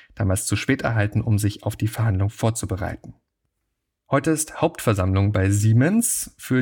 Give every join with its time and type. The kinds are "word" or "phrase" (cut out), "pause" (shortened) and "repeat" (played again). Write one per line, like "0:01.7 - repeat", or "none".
none